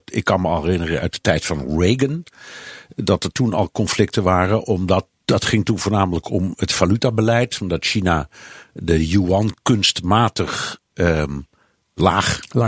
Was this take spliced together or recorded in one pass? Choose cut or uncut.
uncut